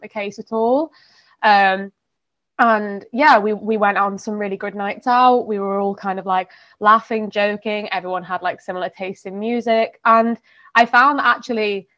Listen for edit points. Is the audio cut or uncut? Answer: uncut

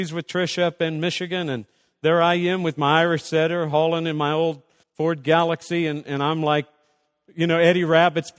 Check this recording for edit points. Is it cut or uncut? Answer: cut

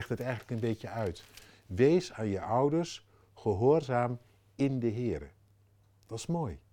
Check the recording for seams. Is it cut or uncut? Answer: uncut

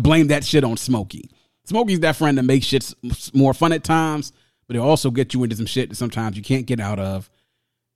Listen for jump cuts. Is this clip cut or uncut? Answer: uncut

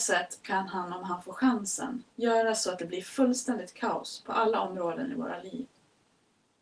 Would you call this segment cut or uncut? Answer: cut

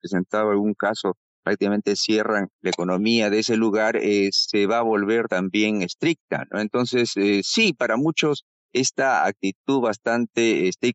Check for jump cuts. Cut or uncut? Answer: cut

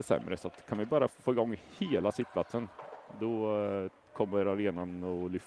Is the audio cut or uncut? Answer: uncut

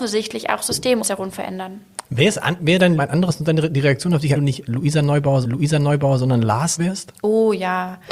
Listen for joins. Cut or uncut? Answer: cut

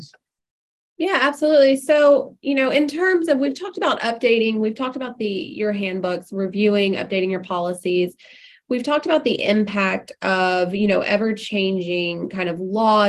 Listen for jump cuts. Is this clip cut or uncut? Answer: uncut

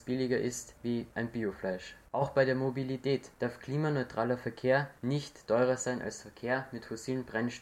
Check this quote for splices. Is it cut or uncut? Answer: cut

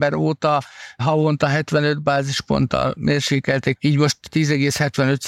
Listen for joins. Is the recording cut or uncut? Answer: cut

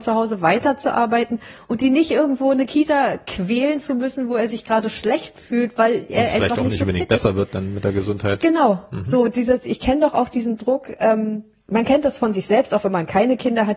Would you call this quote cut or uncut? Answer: uncut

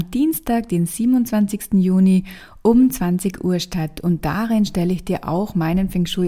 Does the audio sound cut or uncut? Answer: uncut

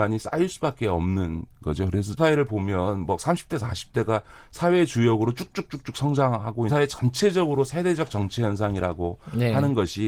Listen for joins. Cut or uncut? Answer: cut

